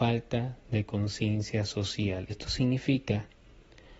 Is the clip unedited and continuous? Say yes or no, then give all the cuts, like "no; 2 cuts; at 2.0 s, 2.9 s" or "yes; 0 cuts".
no; 1 cut; at 2.3 s